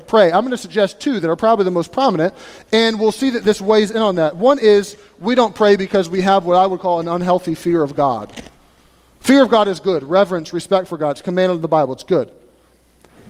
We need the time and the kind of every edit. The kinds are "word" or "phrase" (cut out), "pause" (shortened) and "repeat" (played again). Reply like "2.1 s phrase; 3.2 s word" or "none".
none